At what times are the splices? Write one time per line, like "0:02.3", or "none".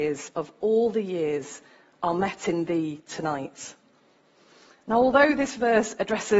none